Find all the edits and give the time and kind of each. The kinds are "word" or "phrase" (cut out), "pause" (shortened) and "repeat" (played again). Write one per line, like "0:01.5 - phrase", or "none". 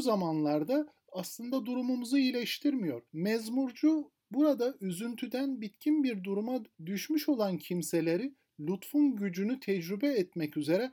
0:03.1 - pause
0:06.7 - pause

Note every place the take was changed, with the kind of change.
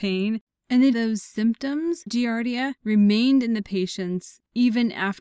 0:00.9 - phrase
0:02.1 - word

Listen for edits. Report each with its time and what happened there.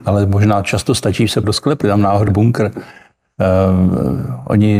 0:01.4 - word
0:01.8 - word
0:02.3 - word

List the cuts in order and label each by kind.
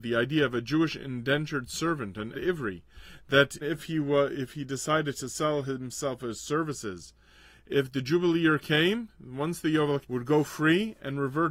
0:02.3 - word
0:03.6 - word
0:10.0 - phrase

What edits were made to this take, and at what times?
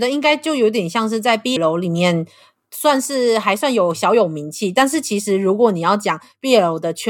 0:01.6 - word

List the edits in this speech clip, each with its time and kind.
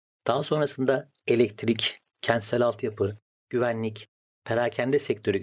0:04.3 - word

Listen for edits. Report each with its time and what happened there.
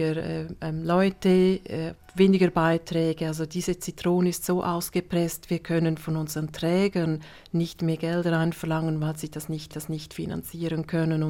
0:09.7 - repeat

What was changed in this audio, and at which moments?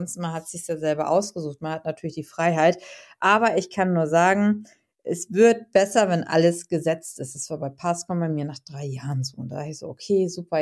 none

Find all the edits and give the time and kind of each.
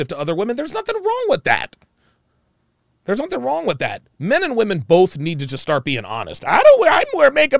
none

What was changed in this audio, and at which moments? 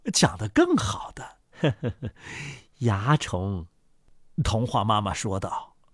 0:01.4 - pause

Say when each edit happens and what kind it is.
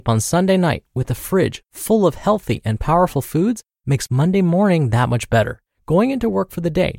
0:05.7 - pause

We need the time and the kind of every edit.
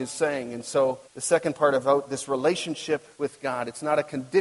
0:01.1 - pause
0:03.1 - pause

